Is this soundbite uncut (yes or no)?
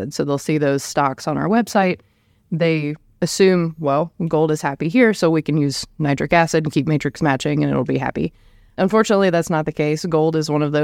yes